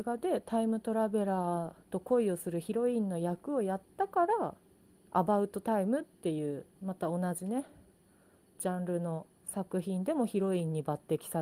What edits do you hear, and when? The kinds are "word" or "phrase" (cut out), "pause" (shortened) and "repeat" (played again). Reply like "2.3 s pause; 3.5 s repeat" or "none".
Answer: 1.8 s pause; 4.6 s pause; 9.4 s pause